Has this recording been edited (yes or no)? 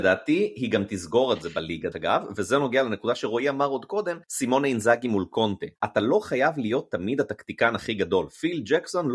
yes